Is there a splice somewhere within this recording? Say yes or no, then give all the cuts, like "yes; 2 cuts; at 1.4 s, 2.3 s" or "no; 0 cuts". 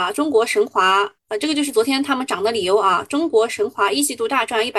yes; 1 cut; at 1.2 s